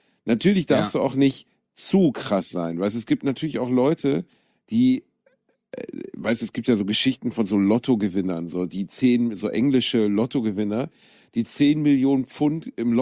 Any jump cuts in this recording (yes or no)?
no